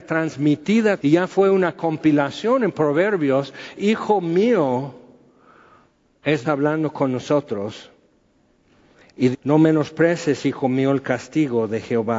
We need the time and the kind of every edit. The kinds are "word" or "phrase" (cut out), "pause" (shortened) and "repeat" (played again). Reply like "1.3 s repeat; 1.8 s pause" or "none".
1.0 s word; 3.8 s word; 6.4 s word; 9.3 s word